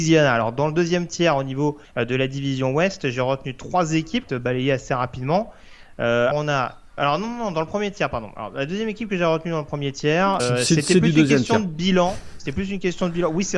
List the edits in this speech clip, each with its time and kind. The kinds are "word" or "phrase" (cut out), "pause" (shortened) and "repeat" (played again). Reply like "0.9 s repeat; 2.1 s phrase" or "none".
1.8 s pause; 4.3 s phrase; 6.3 s word; 7.0 s word; 10.4 s word